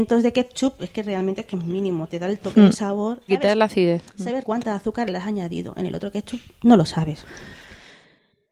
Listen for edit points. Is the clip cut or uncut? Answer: cut